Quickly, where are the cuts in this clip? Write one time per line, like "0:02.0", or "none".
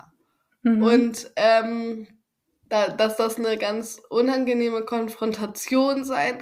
0:02.4